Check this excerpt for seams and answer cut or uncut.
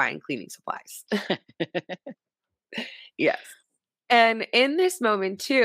uncut